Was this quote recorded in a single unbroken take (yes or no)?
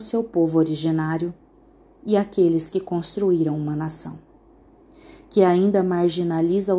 yes